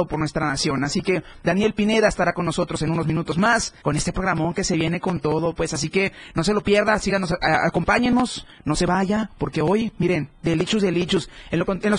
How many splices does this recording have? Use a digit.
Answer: 1